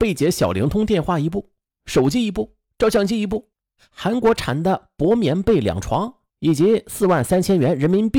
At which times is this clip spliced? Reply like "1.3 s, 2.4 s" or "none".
none